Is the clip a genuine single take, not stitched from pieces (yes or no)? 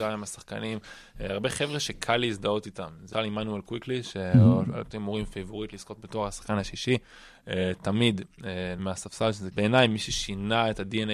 no